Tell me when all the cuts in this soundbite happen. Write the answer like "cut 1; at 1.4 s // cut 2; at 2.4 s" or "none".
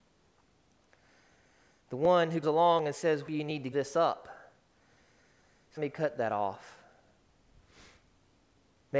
cut 1; at 2.4 s // cut 2; at 3.3 s // cut 3; at 3.7 s // cut 4; at 5.8 s